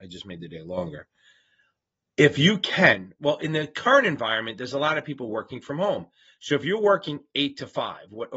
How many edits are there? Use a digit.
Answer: 0